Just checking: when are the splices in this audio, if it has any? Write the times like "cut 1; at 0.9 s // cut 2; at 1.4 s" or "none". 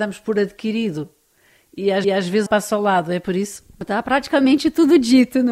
cut 1; at 2.0 s // cut 2; at 2.5 s // cut 3; at 3.7 s